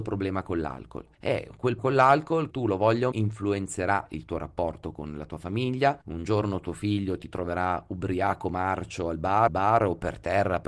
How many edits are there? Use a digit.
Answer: 6